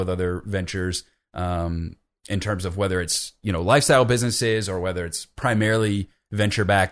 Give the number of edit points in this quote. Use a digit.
0